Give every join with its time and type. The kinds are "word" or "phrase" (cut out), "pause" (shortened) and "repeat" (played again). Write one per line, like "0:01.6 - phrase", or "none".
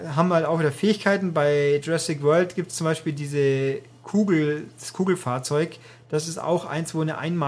none